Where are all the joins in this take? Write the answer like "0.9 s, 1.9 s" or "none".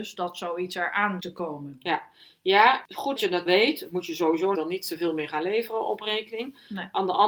1.2 s, 3.2 s, 3.5 s, 4.5 s